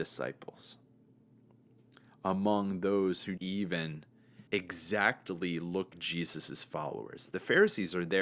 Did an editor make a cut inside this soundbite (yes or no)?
yes